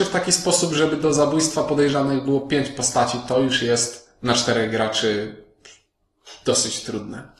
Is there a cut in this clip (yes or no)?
no